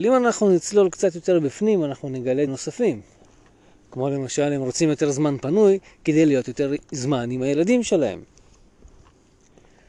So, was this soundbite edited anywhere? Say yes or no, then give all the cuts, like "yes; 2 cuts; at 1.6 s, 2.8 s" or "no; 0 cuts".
yes; 2 cuts; at 2.5 s, 6.8 s